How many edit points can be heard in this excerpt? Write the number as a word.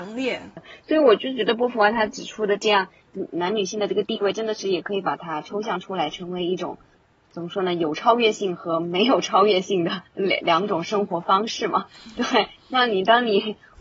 one